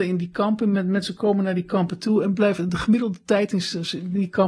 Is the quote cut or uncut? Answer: uncut